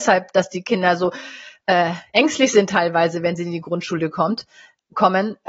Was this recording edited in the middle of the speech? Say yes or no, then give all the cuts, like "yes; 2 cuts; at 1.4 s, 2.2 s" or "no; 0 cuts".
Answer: no; 0 cuts